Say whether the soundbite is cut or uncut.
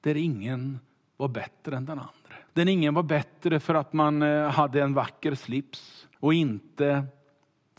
cut